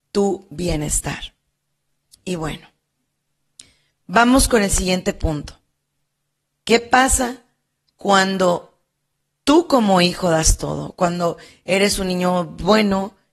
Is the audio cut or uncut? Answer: uncut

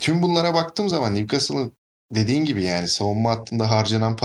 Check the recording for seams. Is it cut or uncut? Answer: uncut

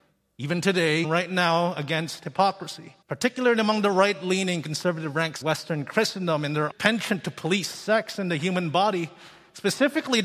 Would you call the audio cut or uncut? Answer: cut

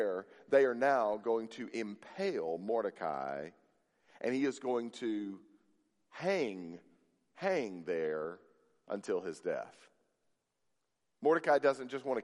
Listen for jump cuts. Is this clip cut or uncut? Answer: uncut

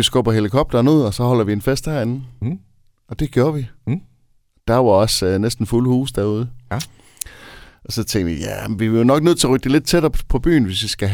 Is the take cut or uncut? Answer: cut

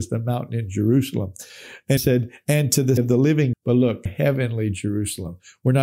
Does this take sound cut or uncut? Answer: cut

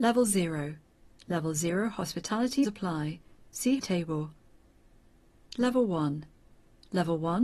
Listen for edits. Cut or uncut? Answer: cut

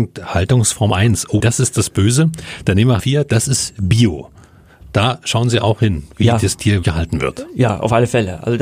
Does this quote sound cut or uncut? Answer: cut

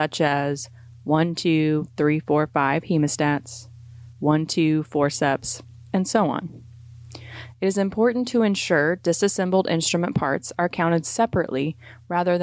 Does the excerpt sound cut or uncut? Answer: uncut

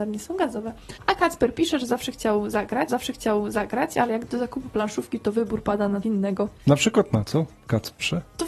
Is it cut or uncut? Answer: cut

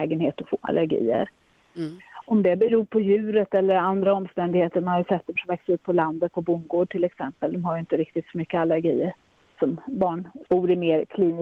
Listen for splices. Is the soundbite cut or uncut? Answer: cut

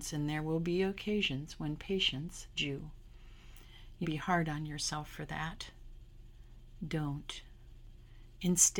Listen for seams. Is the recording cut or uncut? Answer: cut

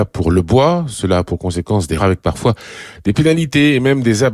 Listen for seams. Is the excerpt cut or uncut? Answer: cut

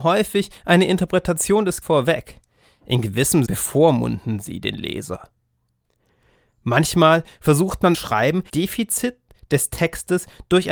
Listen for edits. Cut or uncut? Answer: cut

